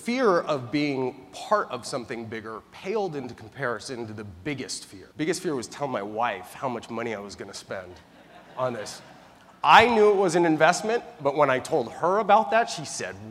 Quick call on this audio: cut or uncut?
cut